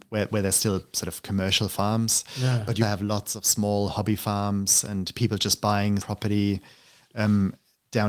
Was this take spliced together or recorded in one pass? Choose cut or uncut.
cut